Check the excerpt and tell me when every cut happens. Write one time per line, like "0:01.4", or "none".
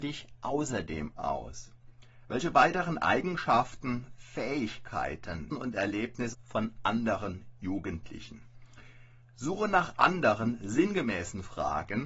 0:05.5
0:06.3